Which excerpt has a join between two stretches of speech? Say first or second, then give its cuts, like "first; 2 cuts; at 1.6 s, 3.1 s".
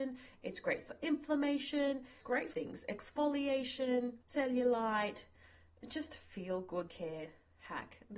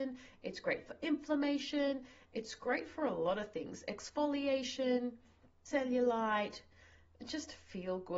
first; 4 cuts; at 2.2 s, 2.5 s, 4.2 s, 6.9 s